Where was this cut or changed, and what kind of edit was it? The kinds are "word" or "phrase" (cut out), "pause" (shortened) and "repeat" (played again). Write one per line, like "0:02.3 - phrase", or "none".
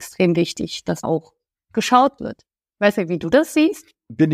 0:01.0 - word
0:02.2 - phrase